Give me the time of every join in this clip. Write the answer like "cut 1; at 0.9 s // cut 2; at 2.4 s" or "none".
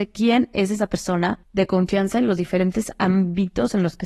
cut 1; at 1.4 s